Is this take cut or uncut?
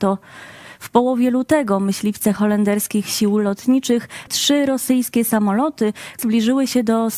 cut